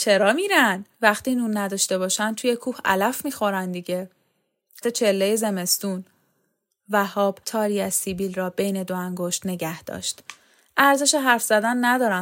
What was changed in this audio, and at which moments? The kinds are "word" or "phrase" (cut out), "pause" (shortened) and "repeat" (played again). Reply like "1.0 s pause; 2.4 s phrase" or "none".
0.9 s pause; 4.8 s phrase; 7.4 s pause